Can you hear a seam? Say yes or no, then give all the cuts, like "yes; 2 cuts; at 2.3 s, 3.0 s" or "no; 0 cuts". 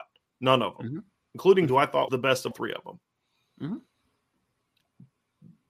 yes; 3 cuts; at 1.7 s, 2.1 s, 2.5 s